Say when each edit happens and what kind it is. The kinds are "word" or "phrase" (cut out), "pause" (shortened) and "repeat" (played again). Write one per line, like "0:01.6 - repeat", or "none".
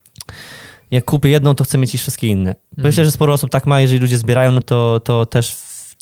0:04.6 - word